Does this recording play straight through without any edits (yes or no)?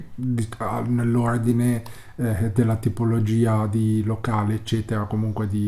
yes